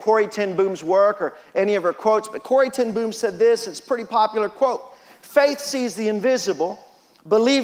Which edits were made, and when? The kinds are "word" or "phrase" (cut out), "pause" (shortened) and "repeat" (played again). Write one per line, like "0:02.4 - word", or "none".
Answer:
none